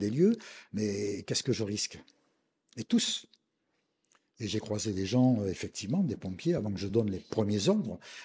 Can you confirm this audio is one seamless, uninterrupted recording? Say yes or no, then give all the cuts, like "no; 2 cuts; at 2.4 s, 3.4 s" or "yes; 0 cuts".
yes; 0 cuts